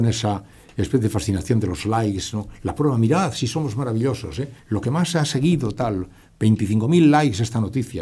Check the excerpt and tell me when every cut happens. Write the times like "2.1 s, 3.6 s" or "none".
4.6 s